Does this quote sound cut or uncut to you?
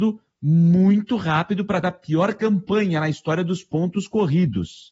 cut